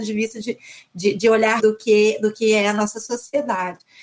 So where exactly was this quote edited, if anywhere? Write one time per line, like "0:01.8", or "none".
0:01.6